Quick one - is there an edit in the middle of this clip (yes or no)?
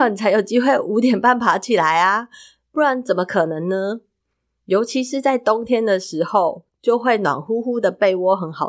no